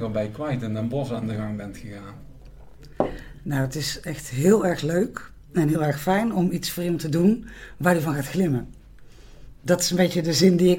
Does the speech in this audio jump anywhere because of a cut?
no; 0 cuts

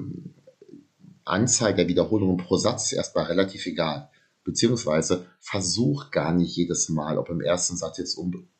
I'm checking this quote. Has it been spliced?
no; 0 cuts

